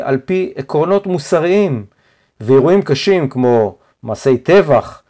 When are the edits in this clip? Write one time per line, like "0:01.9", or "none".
none